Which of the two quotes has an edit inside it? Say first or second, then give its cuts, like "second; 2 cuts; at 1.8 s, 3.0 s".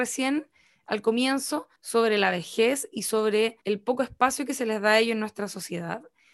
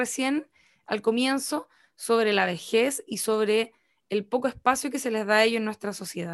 first; 2 cuts; at 1.8 s, 3.6 s